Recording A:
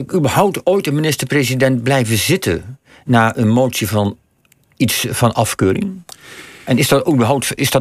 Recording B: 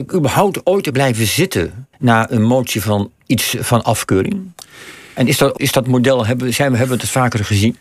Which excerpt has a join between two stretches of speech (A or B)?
B